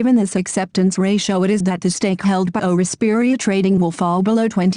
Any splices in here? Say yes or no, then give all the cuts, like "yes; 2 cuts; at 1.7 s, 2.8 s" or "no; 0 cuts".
yes; 3 cuts; at 1.6 s, 2.6 s, 3.8 s